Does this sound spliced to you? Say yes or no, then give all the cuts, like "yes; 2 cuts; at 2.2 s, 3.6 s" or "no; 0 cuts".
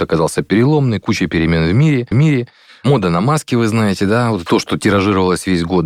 yes; 2 cuts; at 2.1 s, 4.5 s